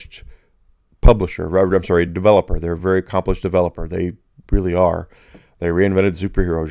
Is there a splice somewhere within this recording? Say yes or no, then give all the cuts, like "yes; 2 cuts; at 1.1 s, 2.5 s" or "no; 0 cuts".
no; 0 cuts